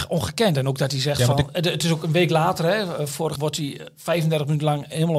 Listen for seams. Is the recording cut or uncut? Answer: cut